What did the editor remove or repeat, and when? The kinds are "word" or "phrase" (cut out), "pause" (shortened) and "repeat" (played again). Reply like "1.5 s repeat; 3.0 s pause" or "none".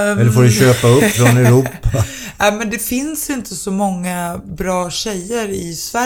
none